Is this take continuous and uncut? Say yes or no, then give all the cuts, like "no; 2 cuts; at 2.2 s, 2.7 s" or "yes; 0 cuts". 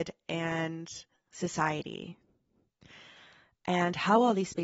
no; 1 cut; at 1.1 s